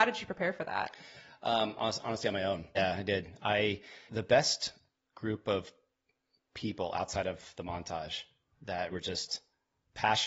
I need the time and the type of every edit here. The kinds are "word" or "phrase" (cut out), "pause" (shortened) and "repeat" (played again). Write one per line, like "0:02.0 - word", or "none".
0:02.7 - word
0:04.1 - word
0:08.9 - word